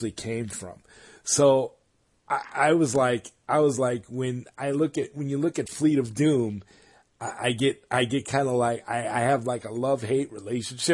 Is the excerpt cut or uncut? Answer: uncut